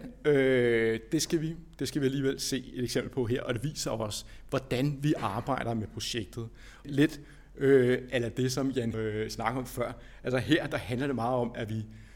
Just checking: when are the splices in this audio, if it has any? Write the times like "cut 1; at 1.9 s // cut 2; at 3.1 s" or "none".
cut 1; at 6.8 s // cut 2; at 8.9 s